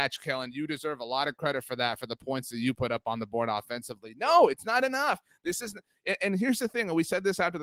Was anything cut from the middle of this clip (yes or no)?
no